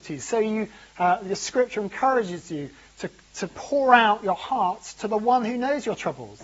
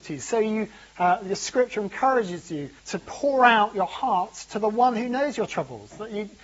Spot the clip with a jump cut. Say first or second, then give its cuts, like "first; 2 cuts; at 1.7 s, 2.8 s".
second; 1 cut; at 2.8 s